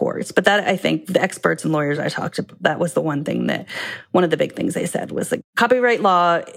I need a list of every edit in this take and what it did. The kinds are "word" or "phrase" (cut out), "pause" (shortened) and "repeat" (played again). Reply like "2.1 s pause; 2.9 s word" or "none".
none